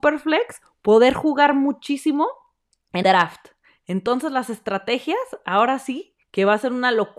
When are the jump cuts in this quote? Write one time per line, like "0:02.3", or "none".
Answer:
0:03.0
0:06.2